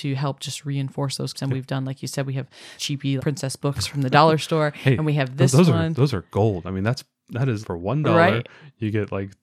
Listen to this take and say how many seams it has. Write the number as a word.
four